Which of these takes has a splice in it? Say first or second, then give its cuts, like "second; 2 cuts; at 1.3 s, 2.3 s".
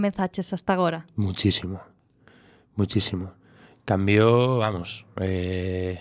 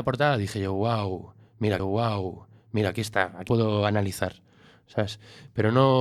second; 2 cuts; at 1.8 s, 3.5 s